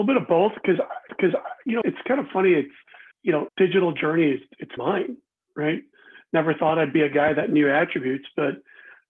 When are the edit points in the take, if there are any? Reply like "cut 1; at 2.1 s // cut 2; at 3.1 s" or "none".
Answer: cut 1; at 1.1 s // cut 2; at 1.8 s // cut 3; at 3.1 s // cut 4; at 3.5 s // cut 5; at 4.8 s

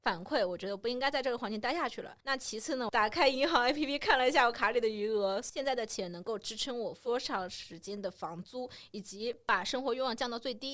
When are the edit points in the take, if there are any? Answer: cut 1; at 2.2 s

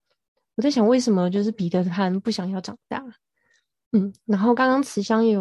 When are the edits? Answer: none

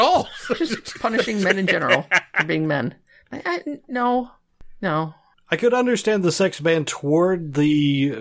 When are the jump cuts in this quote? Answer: none

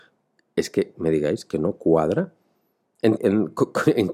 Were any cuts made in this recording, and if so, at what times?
cut 1; at 0.9 s // cut 2; at 3.2 s

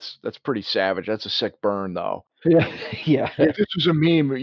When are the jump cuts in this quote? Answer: cut 1; at 3.4 s

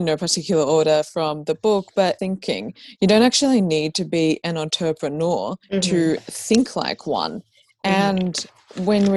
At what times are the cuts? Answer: cut 1; at 2.2 s // cut 2; at 5.6 s

